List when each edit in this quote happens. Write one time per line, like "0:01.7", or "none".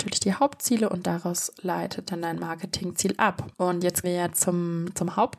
0:02.1
0:03.5
0:04.0